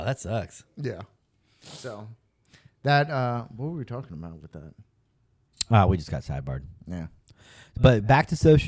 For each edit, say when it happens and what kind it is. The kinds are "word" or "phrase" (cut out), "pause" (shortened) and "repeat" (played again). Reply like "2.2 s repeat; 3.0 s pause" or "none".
none